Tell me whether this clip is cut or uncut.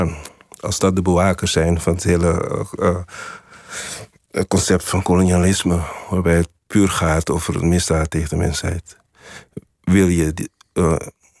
uncut